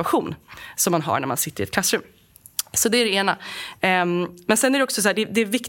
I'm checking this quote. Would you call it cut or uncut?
uncut